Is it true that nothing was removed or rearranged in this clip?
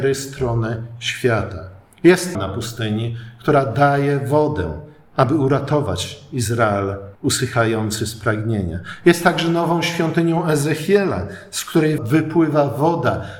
no; 3 cuts; at 2.3 s, 7.1 s, 12.0 s

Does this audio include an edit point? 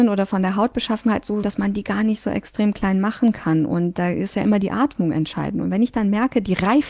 yes; 1 cut; at 1.4 s

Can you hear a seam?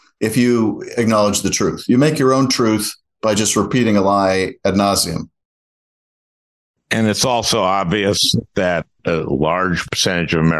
no; 0 cuts

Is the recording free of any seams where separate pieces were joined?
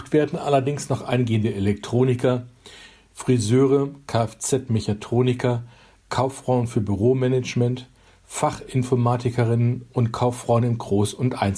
yes; 0 cuts

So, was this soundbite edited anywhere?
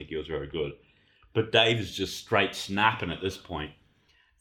no; 0 cuts

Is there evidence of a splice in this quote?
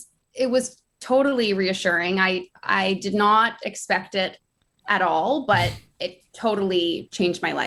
no; 0 cuts

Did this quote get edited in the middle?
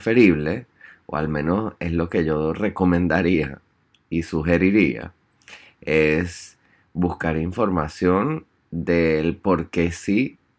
no; 0 cuts

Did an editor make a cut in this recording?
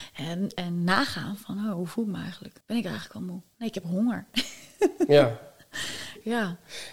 yes; 1 cut; at 2.6 s

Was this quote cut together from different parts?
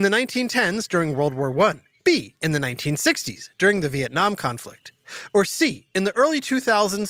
yes; 1 cut; at 2.0 s

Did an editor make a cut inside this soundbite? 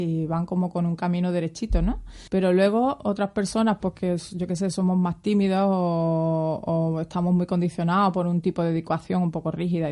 yes; 1 cut; at 2.3 s

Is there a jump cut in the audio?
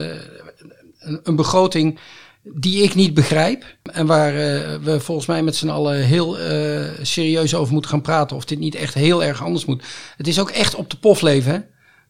yes; 1 cut; at 3.8 s

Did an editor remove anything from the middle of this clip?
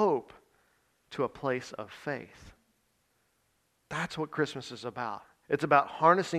yes; 1 cut; at 5.4 s

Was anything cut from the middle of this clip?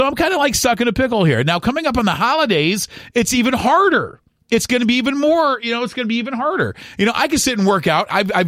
no; 0 cuts

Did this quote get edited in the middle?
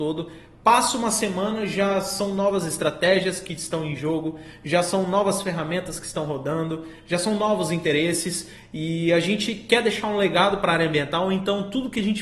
no; 0 cuts

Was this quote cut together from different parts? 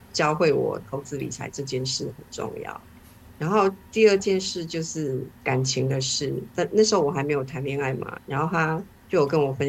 no; 0 cuts

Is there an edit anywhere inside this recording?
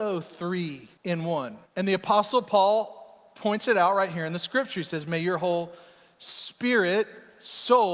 yes; 2 cuts; at 1.0 s, 1.7 s

